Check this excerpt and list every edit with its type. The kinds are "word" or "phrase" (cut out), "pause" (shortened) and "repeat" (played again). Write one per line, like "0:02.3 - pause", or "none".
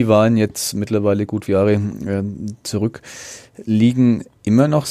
0:01.5 - word